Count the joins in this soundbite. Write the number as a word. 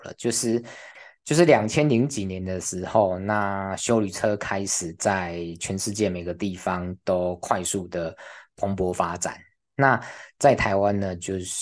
zero